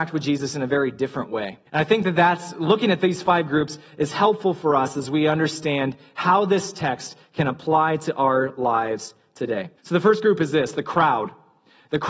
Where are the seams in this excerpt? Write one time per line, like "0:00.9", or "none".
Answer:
0:01.7
0:09.8